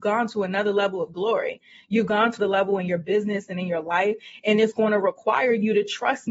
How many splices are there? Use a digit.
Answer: 1